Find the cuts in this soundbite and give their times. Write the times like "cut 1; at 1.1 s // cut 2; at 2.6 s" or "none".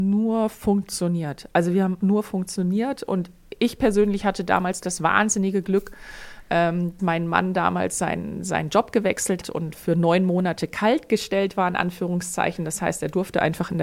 cut 1; at 2.0 s // cut 2; at 7.0 s // cut 3; at 9.4 s // cut 4; at 9.7 s